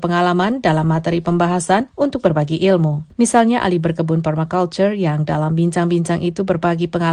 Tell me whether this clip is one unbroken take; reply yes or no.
yes